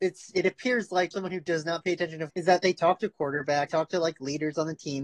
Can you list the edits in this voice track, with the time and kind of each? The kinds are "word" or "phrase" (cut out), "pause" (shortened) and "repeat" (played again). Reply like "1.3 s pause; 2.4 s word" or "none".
1.1 s word; 2.3 s word; 3.7 s word

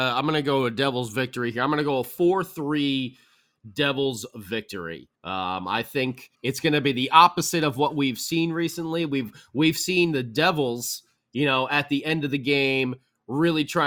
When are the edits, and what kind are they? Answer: 5.1 s pause; 6.3 s pause

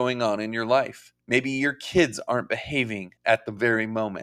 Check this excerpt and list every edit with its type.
1.2 s pause; 3.2 s pause

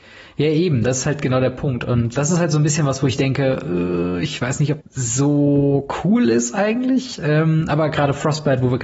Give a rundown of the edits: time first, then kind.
2.2 s word; 4.8 s word

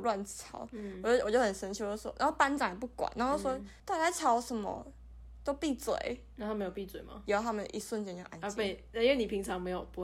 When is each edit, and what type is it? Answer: 3.8 s pause

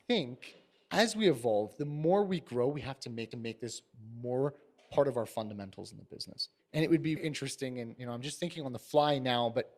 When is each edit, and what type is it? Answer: 3.3 s repeat; 6.6 s pause; 7.2 s word

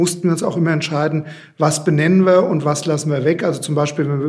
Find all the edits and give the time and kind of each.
none

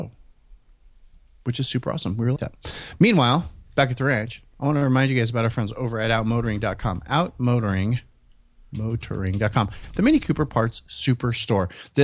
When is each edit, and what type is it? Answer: 2.4 s word

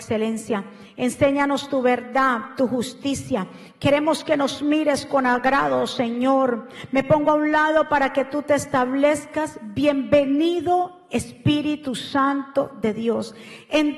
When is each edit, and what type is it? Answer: none

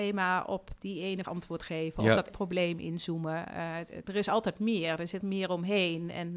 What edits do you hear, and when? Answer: 1.2 s word; 2.3 s word; 4.0 s word; 5.2 s word

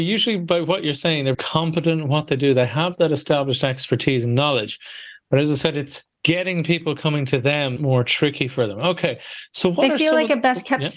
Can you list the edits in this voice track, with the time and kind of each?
1.3 s word; 6.1 s pause; 7.8 s phrase

